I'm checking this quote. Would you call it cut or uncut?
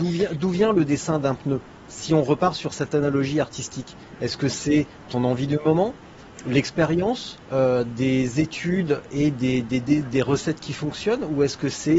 cut